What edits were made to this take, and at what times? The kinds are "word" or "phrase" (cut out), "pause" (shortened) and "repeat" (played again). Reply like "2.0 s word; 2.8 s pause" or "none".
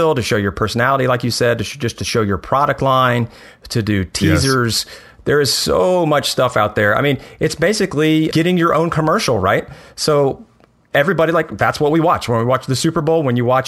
8.3 s word